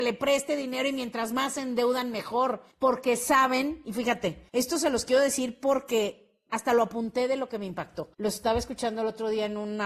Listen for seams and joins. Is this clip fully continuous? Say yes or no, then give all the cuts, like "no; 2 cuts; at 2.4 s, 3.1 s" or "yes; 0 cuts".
no; 3 cuts; at 2.7 s, 4.5 s, 8.1 s